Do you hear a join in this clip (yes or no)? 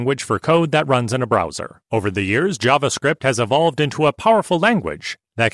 yes